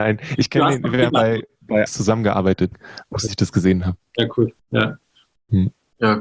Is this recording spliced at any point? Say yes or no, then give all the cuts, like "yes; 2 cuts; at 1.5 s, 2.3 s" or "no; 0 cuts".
yes; 5 cuts; at 1.1 s, 1.9 s, 2.7 s, 3.3 s, 4.6 s